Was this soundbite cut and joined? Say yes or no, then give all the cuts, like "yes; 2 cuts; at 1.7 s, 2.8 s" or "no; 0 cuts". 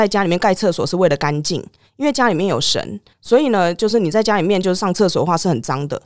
no; 0 cuts